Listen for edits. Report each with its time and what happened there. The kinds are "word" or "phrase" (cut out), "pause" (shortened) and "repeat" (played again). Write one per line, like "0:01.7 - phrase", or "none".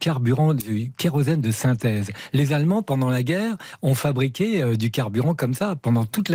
none